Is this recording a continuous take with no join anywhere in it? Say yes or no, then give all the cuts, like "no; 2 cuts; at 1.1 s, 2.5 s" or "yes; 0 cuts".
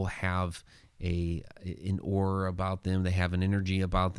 yes; 0 cuts